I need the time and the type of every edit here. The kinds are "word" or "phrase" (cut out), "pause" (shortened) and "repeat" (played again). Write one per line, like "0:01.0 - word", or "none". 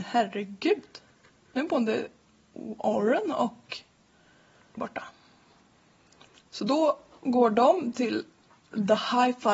0:04.8 - word